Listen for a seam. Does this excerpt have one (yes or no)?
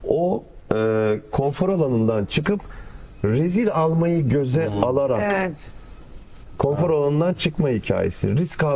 no